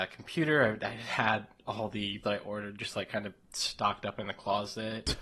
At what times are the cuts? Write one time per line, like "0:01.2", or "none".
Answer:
0:02.2